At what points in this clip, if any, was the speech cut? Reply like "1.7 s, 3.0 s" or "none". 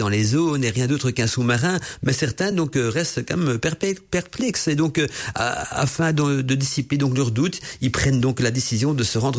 none